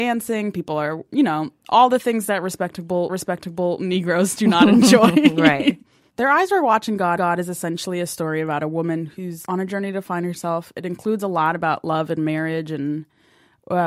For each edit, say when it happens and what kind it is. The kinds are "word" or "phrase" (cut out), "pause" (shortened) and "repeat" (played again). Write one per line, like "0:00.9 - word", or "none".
0:03.1 - repeat
0:07.2 - repeat
0:09.5 - word